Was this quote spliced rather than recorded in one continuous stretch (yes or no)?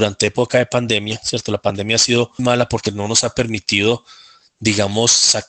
yes